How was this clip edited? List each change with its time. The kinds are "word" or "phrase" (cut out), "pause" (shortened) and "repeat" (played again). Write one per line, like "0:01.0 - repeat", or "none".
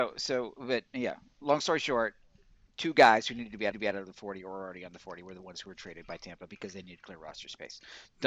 0:03.7 - repeat